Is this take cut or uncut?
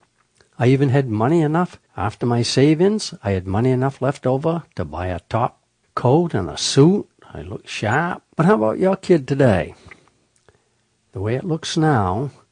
cut